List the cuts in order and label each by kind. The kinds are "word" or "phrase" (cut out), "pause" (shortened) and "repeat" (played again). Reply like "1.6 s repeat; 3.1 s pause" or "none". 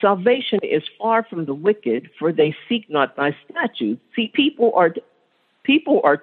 none